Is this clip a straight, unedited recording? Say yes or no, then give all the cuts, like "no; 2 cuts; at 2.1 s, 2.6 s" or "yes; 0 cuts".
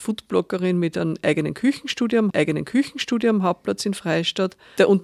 no; 1 cut; at 2.3 s